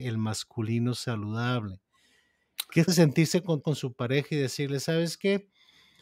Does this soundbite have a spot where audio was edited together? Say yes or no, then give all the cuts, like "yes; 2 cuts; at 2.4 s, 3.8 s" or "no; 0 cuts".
yes; 2 cuts; at 2.9 s, 3.6 s